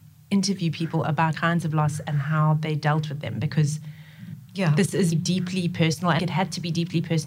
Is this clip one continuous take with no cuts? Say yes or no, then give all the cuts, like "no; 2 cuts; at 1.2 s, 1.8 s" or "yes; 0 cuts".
no; 4 cuts; at 1.3 s, 4.5 s, 5.1 s, 6.2 s